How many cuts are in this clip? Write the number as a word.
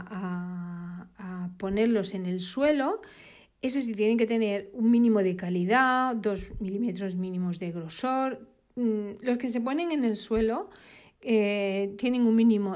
zero